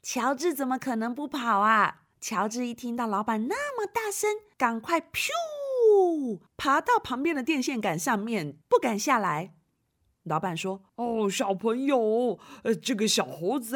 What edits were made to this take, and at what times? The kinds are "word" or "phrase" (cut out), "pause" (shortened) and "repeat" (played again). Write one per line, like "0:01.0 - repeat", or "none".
0:02.1 - pause